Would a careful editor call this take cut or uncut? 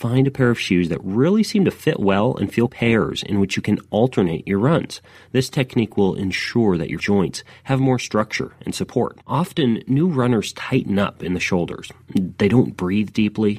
cut